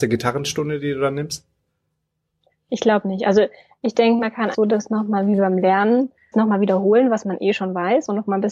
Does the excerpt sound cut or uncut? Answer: cut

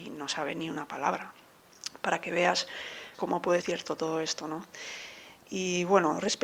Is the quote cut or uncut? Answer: cut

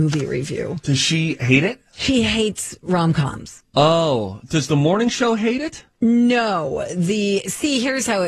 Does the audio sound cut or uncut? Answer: cut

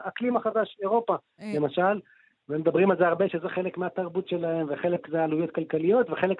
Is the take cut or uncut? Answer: uncut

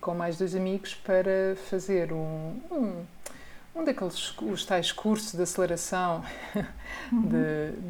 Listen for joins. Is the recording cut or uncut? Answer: uncut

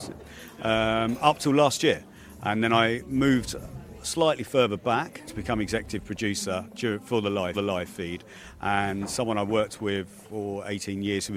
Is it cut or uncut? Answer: cut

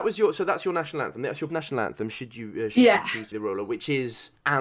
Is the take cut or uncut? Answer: cut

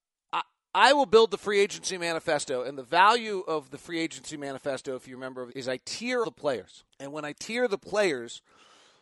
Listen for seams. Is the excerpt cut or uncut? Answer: cut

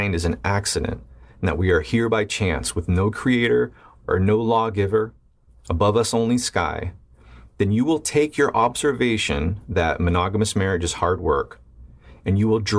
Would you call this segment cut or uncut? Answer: uncut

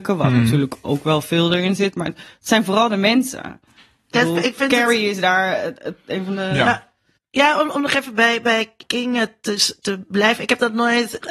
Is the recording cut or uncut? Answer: uncut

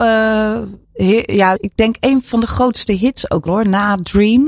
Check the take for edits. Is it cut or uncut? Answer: cut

